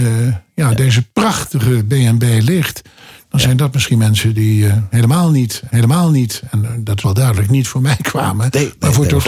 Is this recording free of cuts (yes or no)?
no